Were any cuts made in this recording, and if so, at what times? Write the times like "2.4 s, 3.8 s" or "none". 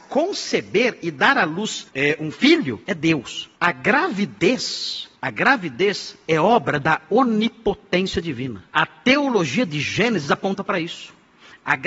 1.9 s, 2.8 s, 3.6 s, 5.2 s, 8.7 s

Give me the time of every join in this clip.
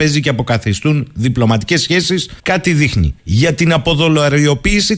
2.4 s, 3.2 s

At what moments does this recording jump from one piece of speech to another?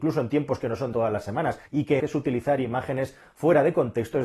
0.9 s, 1.7 s, 2.0 s

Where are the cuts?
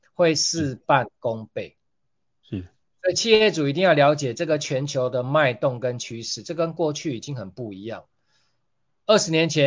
none

